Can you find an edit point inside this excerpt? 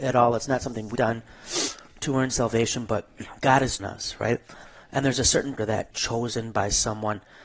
yes; 4 cuts; at 0.9 s, 3.8 s, 5.6 s, 5.9 s

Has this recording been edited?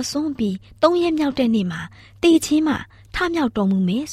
no; 0 cuts

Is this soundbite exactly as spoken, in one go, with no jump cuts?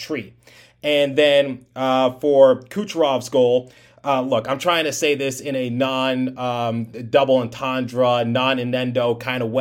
yes; 0 cuts

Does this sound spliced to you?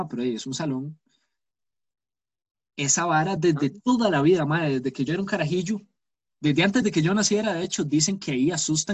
no; 0 cuts

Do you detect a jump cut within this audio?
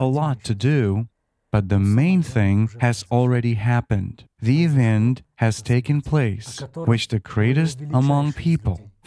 no; 0 cuts

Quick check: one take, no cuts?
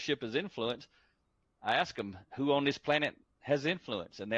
yes; 0 cuts

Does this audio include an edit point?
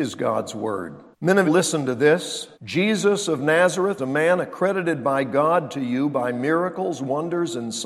yes; 4 cuts; at 1.1 s, 1.4 s, 2.5 s, 4.0 s

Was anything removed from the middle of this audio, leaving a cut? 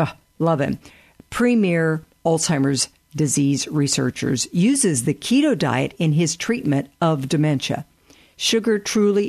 no; 0 cuts

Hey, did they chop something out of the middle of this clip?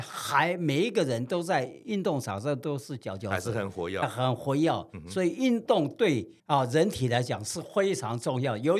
yes; 2 cuts; at 4.0 s, 6.4 s

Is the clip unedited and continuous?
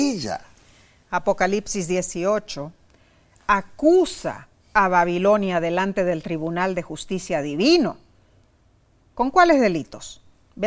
yes; 0 cuts

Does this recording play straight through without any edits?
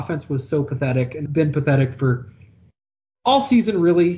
no; 1 cut; at 1.3 s

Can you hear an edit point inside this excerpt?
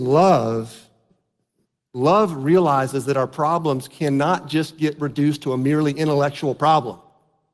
no; 0 cuts

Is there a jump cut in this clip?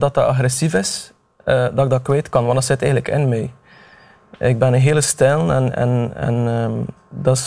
no; 0 cuts

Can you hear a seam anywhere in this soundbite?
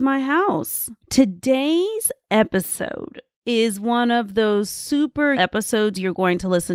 yes; 2 cuts; at 1.0 s, 5.3 s

